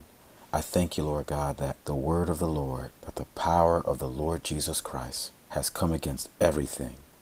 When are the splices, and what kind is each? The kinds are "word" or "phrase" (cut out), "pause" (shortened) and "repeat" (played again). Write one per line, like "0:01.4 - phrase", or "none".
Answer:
0:01.8 - pause
0:03.0 - pause
0:05.4 - pause